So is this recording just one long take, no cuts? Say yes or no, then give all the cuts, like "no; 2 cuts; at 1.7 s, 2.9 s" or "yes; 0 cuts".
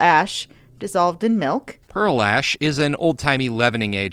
no; 1 cut; at 1.8 s